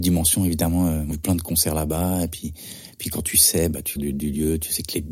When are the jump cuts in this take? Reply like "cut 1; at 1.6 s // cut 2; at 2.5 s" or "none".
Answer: cut 1; at 1.1 s // cut 2; at 4.0 s

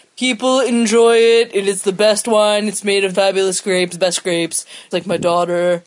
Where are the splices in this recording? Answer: cut 1; at 3.1 s // cut 2; at 3.9 s // cut 3; at 4.9 s

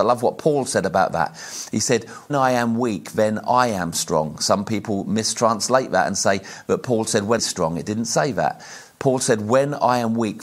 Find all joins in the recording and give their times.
cut 1; at 2.3 s // cut 2; at 7.4 s

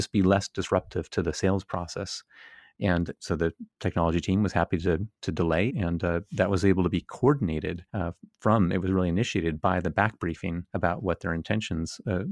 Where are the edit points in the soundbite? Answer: cut 1; at 3.1 s // cut 2; at 5.7 s // cut 3; at 7.9 s // cut 4; at 10.7 s

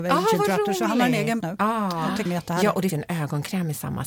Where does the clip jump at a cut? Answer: cut 1; at 1.4 s // cut 2; at 2.2 s // cut 3; at 2.9 s

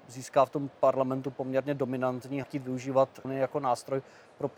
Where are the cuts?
cut 1; at 2.4 s // cut 2; at 3.2 s

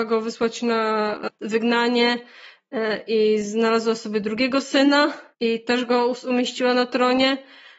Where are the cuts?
cut 1; at 5.3 s

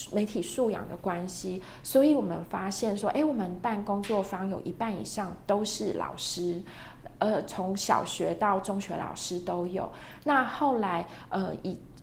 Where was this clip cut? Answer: none

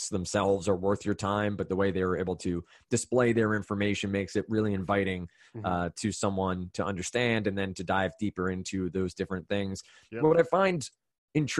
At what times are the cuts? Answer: none

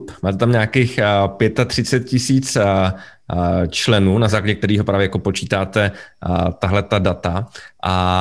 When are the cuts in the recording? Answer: none

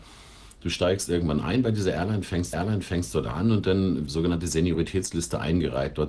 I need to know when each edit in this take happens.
cut 1; at 2.5 s // cut 2; at 4.1 s

